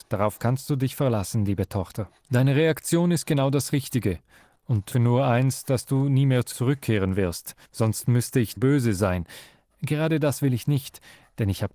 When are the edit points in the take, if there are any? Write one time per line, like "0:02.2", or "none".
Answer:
0:04.9
0:06.5
0:07.6
0:08.6

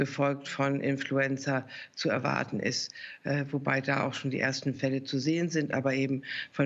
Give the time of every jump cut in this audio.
none

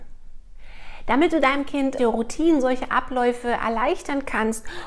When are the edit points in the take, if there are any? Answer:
0:02.0

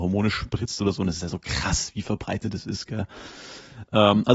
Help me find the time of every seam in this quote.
none

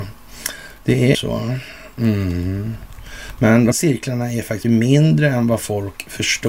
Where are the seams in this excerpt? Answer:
0:01.1
0:03.7
0:04.6

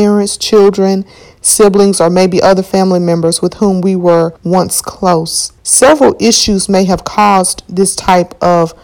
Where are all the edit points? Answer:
0:04.4
0:05.6

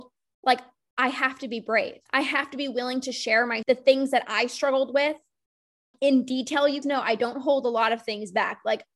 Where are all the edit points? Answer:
0:02.1
0:03.6
0:05.9
0:06.8

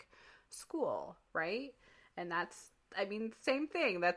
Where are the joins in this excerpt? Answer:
none

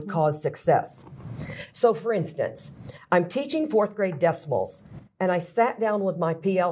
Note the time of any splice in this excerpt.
none

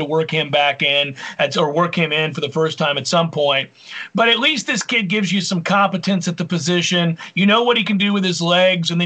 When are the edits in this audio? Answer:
none

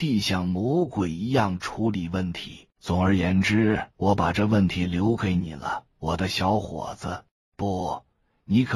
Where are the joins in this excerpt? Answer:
0:02.7
0:03.9
0:05.9
0:07.3

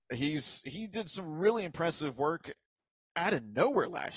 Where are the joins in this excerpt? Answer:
none

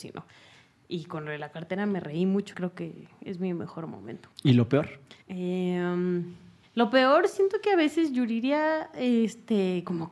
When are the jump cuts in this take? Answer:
0:02.5
0:04.3
0:05.2
0:06.6

